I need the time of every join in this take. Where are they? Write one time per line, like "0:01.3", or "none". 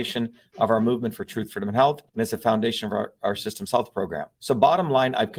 0:02.1
0:04.3

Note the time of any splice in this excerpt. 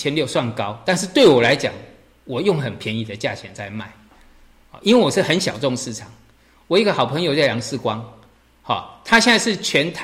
none

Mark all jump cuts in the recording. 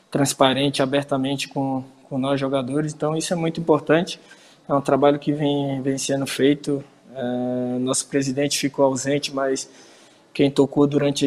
none

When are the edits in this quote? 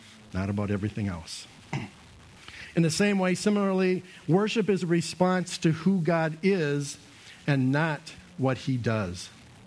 0:01.9

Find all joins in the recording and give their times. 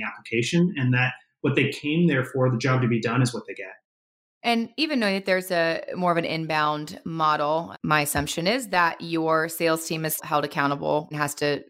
0:10.2

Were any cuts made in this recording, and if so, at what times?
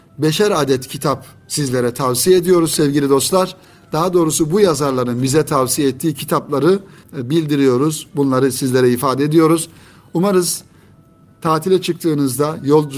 0:07.0

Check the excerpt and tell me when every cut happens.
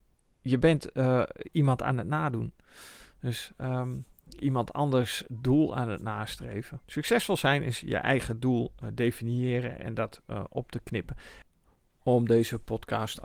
0:06.8

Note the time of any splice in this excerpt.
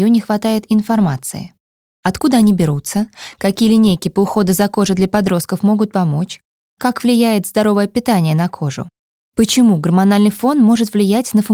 none

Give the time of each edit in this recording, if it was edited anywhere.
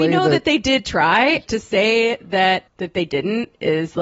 0:01.5
0:02.7

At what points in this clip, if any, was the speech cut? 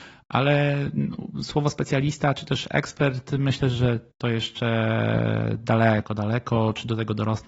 none

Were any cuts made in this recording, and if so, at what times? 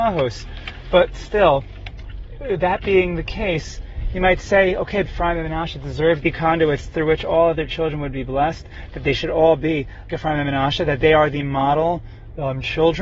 0:05.1
0:06.2
0:10.1

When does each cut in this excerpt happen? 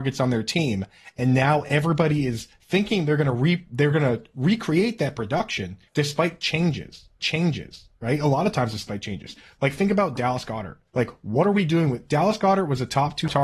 0:05.9
0:07.2
0:10.9

